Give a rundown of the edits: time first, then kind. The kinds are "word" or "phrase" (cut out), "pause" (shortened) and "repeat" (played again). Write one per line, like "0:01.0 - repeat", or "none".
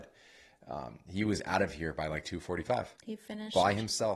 0:03.0 - pause